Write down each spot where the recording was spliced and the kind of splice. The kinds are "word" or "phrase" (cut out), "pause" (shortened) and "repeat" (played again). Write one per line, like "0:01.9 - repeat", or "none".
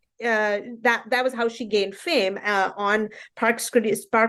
none